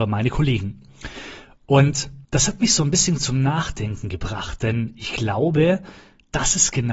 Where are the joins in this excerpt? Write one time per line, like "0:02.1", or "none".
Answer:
0:02.2